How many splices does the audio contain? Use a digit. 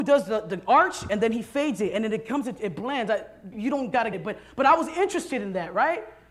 2